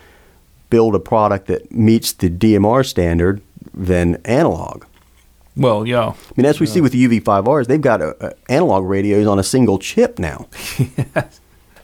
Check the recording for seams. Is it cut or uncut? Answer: uncut